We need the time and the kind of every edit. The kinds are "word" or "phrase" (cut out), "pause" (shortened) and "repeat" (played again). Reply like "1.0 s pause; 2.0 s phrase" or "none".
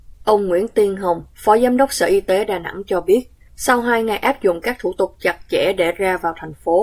1.3 s pause; 3.4 s pause